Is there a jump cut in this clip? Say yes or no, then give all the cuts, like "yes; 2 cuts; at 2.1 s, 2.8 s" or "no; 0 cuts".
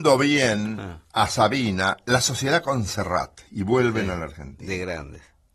no; 0 cuts